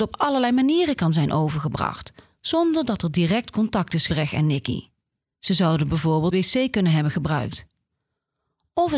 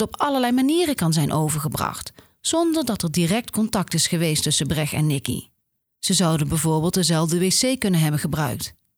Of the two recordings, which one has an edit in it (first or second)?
first